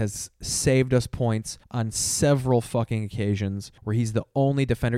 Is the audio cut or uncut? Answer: cut